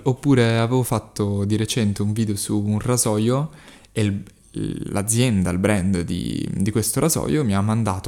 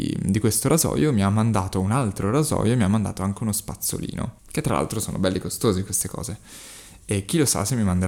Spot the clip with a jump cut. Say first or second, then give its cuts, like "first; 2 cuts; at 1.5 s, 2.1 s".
second; 1 cut; at 4.4 s